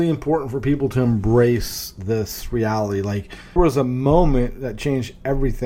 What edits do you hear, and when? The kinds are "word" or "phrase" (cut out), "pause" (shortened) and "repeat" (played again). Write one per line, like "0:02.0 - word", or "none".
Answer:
0:03.6 - word

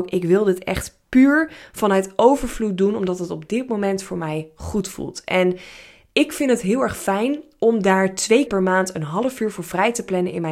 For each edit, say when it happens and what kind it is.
0:08.5 - word

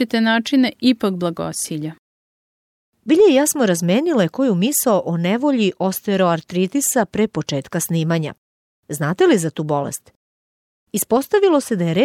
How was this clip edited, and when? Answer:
none

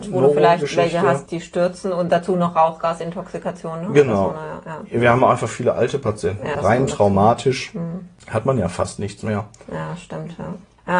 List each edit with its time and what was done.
0:01.3 - word
0:06.5 - word

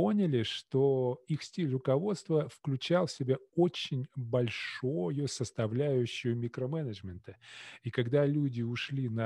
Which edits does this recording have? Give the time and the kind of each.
none

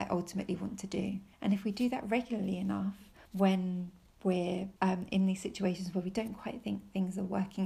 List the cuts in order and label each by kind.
0:01.3 - pause
0:03.2 - pause
0:04.8 - pause

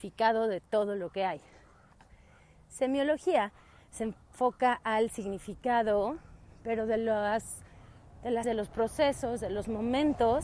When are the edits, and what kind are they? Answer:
0:08.4 - word

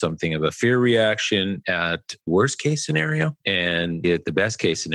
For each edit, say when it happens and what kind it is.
0:02.3 - word
0:04.0 - word

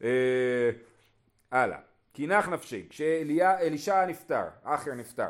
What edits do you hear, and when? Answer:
none

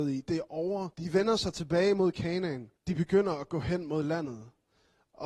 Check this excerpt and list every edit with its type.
0:00.9 - pause
0:02.8 - pause

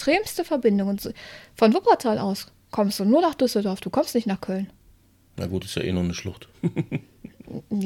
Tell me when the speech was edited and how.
none

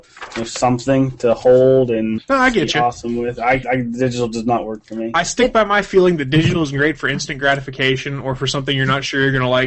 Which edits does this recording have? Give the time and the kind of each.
0:02.2 - word
0:03.6 - word

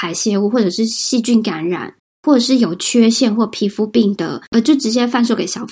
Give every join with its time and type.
0:02.0 - pause
0:04.5 - pause

